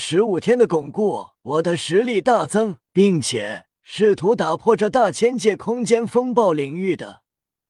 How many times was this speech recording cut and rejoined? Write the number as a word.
three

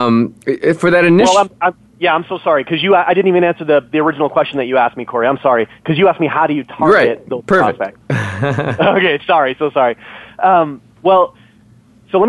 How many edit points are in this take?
one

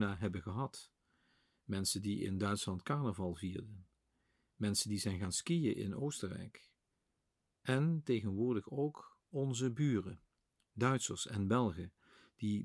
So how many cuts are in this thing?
zero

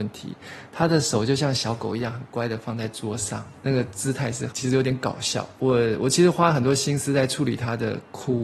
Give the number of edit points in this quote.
one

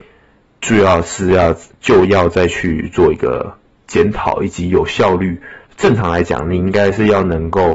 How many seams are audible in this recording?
two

